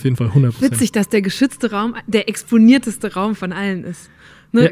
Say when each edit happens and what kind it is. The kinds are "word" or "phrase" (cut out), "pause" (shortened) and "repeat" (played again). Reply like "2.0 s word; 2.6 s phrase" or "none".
none